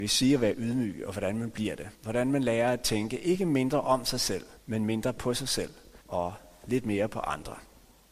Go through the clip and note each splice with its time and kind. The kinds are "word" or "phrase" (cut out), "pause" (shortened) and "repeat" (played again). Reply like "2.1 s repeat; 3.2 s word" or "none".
1.9 s pause; 4.6 s pause; 6.0 s pause